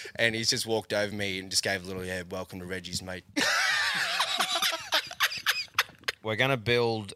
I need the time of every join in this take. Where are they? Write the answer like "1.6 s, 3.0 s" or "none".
none